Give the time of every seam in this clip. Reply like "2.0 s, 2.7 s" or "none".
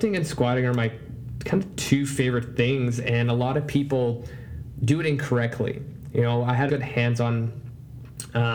6.7 s